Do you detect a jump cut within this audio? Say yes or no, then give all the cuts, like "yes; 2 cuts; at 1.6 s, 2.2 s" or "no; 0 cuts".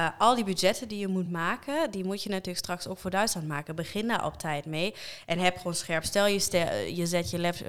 no; 0 cuts